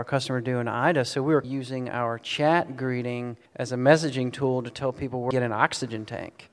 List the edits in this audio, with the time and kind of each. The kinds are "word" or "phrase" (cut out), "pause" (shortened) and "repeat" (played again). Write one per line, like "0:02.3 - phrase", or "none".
0:01.4 - word
0:03.5 - pause
0:05.3 - phrase